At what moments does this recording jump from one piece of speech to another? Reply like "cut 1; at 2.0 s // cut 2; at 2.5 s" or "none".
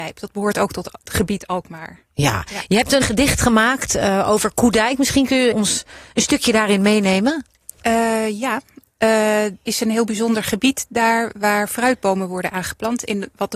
cut 1; at 3.0 s // cut 2; at 5.5 s // cut 3; at 9.6 s